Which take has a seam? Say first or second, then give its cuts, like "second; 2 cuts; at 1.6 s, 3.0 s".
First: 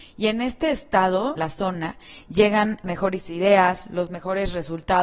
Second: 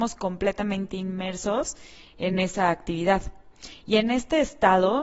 first; 2 cuts; at 1.4 s, 2.8 s